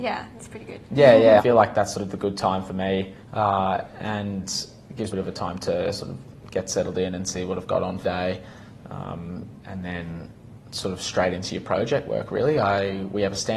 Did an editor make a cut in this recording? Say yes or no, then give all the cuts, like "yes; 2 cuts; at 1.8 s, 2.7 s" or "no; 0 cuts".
yes; 6 cuts; at 1.4 s, 3.2 s, 5.1 s, 8.0 s, 9.6 s, 10.6 s